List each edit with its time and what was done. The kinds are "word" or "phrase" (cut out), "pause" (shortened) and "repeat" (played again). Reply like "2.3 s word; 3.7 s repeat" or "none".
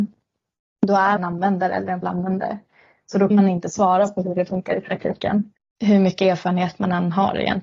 1.2 s phrase; 2.0 s word; 3.3 s word; 5.6 s pause